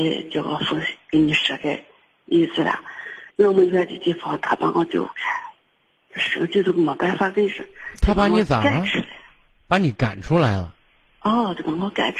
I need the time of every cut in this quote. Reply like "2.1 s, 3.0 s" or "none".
3.3 s

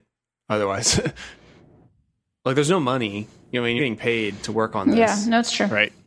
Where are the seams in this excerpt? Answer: 3.8 s

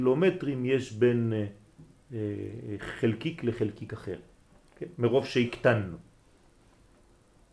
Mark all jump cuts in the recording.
none

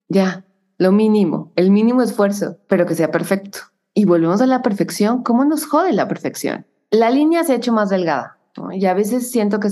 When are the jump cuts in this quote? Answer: none

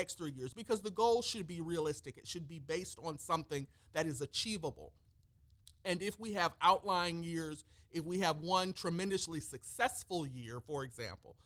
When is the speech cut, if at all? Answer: none

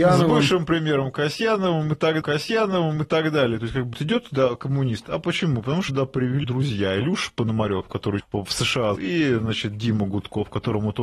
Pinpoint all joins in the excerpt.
2.2 s, 3.9 s, 5.9 s, 6.4 s, 8.2 s, 9.0 s

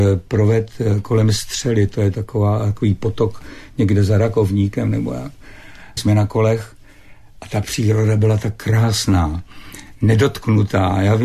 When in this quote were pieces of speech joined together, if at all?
6.0 s

